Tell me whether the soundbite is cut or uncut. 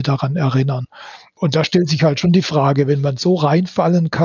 uncut